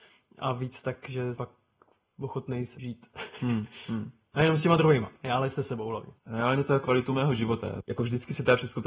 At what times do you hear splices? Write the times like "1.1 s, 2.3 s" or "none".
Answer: 1.3 s, 2.7 s, 5.1 s, 6.2 s, 6.8 s

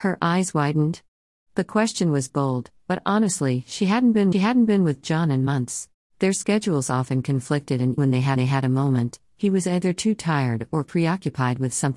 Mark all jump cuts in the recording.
4.3 s, 6.0 s, 8.0 s, 8.4 s

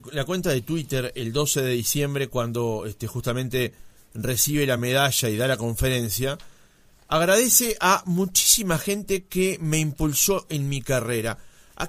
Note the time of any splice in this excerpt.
none

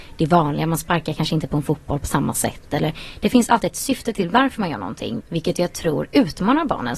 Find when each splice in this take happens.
5.2 s

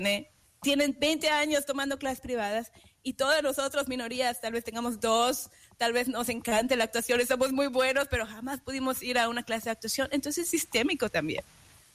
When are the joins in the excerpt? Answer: none

